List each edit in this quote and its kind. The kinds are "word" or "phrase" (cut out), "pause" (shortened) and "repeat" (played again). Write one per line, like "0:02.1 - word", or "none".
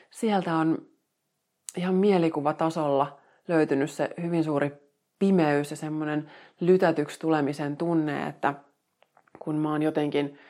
none